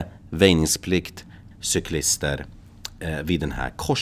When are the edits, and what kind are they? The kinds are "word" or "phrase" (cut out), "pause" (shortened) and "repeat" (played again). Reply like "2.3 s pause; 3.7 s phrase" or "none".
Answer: 1.5 s word